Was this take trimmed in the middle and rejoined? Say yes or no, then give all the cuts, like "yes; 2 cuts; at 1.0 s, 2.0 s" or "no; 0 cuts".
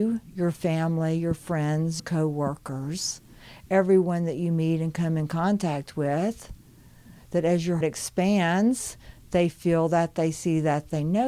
yes; 2 cuts; at 2.0 s, 7.8 s